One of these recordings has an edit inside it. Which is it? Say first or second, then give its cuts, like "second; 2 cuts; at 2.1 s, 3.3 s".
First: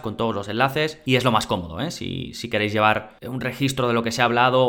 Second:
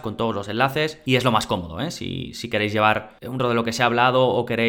second; 1 cut; at 3.4 s